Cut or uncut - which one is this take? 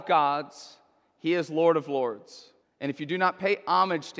cut